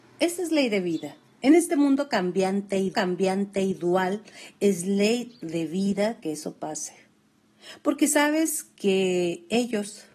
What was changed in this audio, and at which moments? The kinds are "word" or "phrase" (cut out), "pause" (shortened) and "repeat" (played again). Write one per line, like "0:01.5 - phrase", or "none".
0:02.9 - repeat

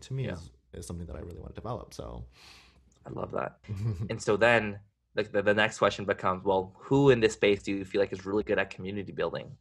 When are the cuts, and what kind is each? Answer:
0:03.6 - pause

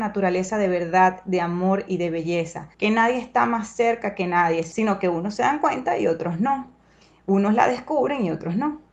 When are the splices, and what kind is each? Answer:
0:02.7 - pause

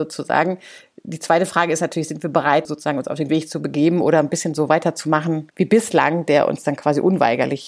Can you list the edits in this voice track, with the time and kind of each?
0:02.6 - word
0:03.3 - word

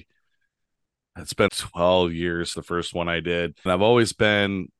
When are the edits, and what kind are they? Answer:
0:01.5 - word
0:02.5 - word
0:03.7 - word

